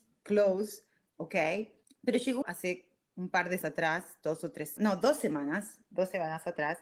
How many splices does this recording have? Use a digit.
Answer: 5